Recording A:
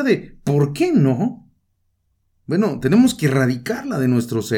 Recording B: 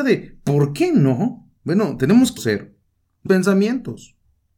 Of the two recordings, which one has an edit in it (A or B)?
B